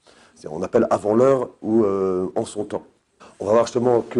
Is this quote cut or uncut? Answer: cut